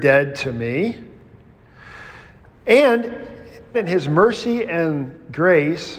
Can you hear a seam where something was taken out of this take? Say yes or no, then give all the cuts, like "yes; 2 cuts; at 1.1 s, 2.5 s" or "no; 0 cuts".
yes; 1 cut; at 3.7 s